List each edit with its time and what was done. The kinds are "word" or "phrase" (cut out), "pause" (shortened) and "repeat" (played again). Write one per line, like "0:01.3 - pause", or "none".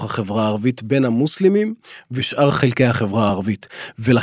none